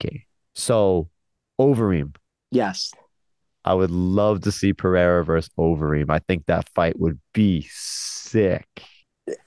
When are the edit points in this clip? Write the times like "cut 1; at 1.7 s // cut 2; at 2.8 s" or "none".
none